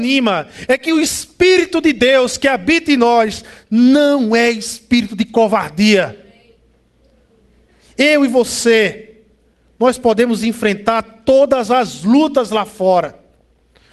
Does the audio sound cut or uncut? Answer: uncut